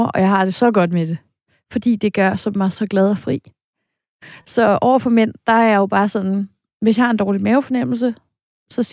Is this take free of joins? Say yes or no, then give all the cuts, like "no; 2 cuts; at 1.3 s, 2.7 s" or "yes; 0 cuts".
yes; 0 cuts